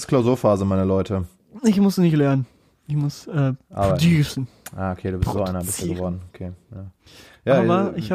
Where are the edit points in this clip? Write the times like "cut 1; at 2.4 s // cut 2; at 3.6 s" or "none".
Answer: none